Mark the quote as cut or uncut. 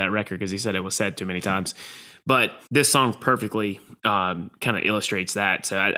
cut